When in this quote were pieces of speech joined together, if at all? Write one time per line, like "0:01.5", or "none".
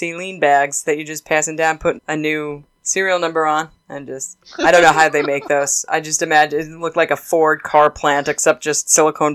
0:02.0
0:03.8

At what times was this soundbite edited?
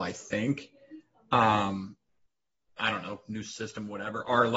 0:02.8

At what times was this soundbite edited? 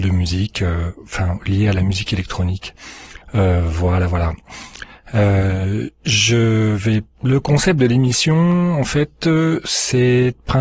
0:03.2
0:07.1

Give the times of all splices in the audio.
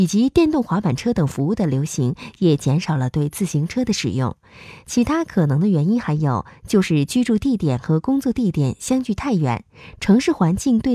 none

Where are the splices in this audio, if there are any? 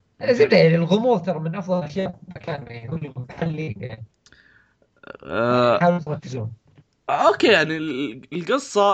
0:06.8

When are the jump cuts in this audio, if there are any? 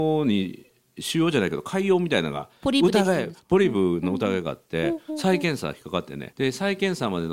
0:06.3

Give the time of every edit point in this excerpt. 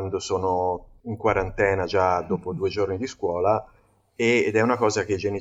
none

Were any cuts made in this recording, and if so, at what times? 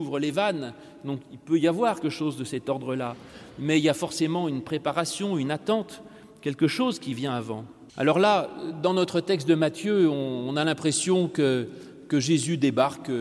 0:02.0
0:07.9

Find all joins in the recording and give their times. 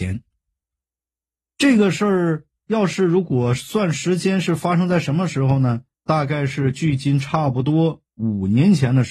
0:05.9
0:08.1

